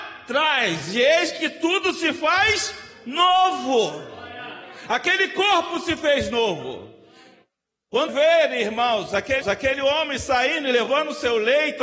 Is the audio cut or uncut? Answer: cut